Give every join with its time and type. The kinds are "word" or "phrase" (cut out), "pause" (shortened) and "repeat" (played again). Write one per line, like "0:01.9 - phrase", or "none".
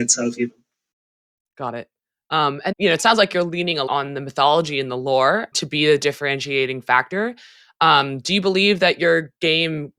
0:02.7 - word
0:03.9 - word
0:05.5 - word